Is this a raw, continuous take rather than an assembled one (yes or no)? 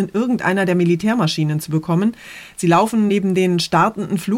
yes